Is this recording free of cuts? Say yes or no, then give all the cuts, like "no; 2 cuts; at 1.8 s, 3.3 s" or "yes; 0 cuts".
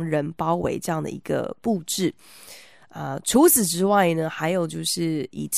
yes; 0 cuts